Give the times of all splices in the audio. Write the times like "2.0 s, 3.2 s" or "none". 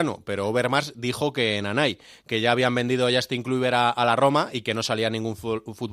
none

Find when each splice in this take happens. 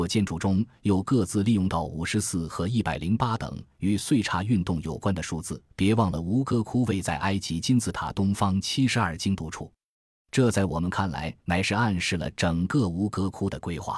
5.7 s, 11.4 s

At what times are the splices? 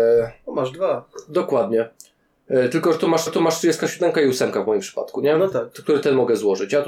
3.3 s

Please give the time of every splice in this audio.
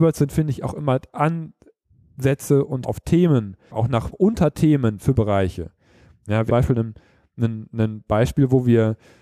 2.8 s, 3.7 s, 4.1 s, 5.1 s, 6.5 s

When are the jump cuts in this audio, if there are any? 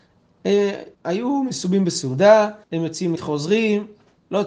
0.9 s, 2.6 s, 3.2 s

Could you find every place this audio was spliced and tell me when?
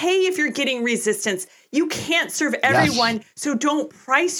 none

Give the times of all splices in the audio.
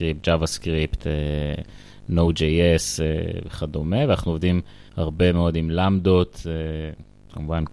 4.9 s

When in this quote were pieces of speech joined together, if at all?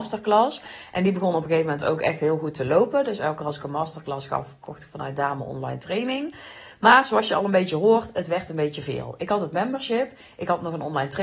none

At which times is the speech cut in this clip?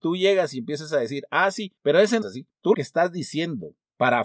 2.2 s, 2.7 s

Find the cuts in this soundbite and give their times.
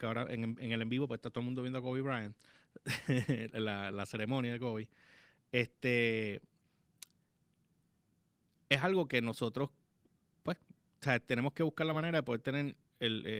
none

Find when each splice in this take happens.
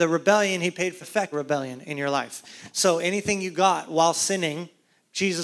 1.0 s, 1.3 s

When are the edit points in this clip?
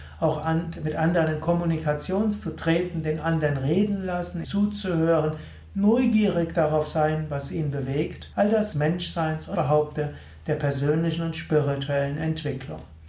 4.4 s, 8.3 s, 8.7 s, 9.5 s

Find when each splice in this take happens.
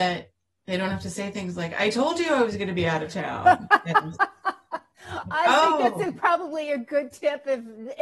none

